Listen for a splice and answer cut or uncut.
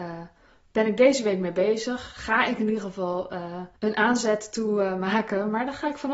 cut